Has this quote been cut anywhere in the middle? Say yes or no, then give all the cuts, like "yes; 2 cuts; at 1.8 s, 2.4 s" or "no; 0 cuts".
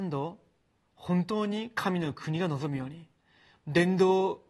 no; 0 cuts